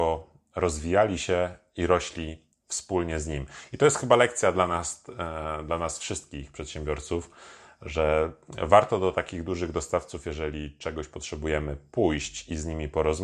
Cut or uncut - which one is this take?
uncut